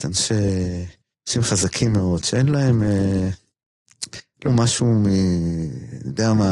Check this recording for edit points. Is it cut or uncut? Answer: cut